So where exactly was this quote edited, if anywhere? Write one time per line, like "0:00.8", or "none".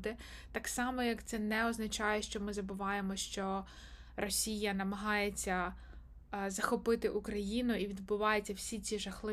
none